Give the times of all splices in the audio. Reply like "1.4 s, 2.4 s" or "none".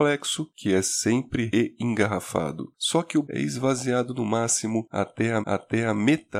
1.5 s, 3.2 s, 5.4 s